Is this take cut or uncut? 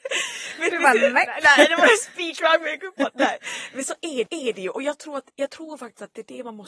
cut